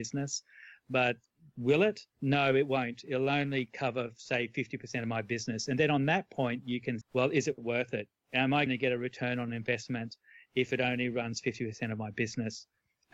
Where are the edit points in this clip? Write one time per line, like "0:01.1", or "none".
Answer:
0:02.1
0:07.0
0:08.7